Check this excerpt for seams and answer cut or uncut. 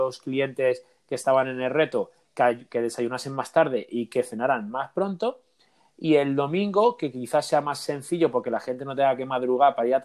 cut